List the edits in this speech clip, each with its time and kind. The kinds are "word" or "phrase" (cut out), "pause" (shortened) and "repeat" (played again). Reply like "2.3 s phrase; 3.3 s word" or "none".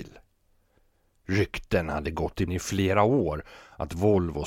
2.5 s word